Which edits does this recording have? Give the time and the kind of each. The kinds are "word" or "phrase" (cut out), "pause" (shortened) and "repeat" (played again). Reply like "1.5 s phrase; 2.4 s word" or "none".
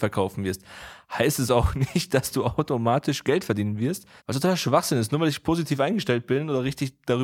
4.2 s pause